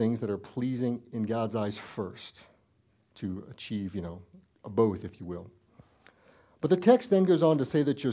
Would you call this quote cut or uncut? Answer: uncut